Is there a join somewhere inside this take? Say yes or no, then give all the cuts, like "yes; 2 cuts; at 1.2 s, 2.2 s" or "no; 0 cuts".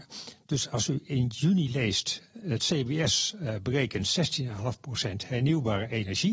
no; 0 cuts